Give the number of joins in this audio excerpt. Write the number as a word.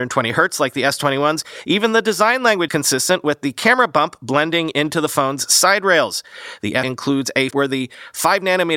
three